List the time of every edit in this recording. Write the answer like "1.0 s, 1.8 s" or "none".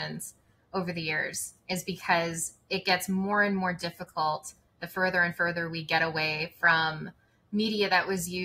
none